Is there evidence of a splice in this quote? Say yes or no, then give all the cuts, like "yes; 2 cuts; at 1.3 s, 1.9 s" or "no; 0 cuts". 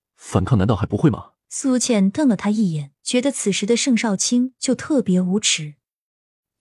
yes; 2 cuts; at 1.4 s, 3.0 s